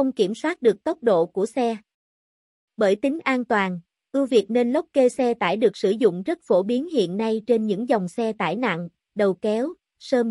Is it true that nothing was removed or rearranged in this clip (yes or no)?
yes